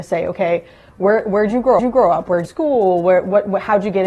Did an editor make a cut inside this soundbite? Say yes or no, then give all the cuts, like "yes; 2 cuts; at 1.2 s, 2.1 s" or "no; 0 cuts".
yes; 2 cuts; at 1.8 s, 2.4 s